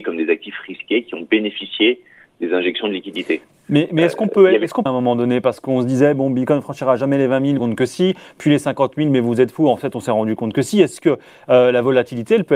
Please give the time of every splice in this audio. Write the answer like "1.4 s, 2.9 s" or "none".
4.9 s, 7.6 s